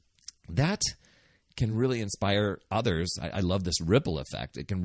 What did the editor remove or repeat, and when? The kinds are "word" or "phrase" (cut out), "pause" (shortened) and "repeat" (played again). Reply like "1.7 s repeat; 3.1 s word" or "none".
none